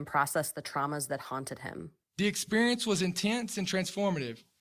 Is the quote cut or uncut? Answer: uncut